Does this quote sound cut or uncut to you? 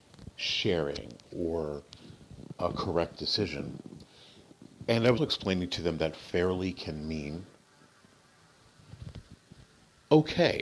cut